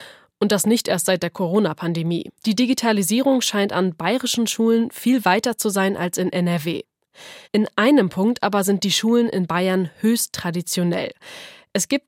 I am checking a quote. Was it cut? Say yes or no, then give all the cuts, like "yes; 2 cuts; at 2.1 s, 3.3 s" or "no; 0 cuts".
yes; 2 cuts; at 2.4 s, 7.4 s